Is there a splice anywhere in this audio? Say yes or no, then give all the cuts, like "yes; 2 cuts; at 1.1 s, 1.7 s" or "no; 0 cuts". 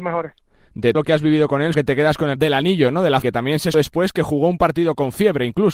yes; 5 cuts; at 0.9 s, 1.7 s, 2.4 s, 3.2 s, 3.7 s